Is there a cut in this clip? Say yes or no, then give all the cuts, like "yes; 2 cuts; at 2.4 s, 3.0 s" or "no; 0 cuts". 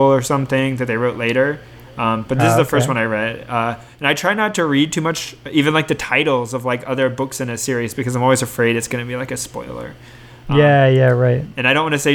no; 0 cuts